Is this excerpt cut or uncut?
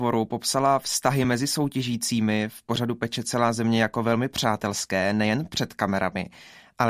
uncut